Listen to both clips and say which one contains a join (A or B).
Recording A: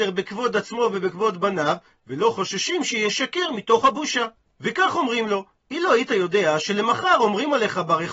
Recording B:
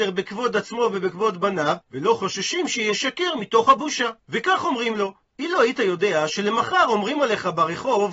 B